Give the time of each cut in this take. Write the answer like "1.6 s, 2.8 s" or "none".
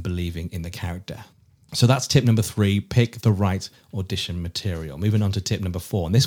none